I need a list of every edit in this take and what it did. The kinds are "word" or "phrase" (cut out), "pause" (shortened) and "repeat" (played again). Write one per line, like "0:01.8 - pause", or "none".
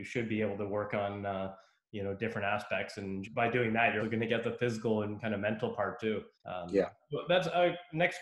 0:03.2 - word
0:04.0 - word
0:06.3 - pause